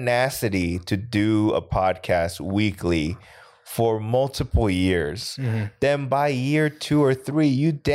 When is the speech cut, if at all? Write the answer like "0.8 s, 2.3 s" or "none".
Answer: none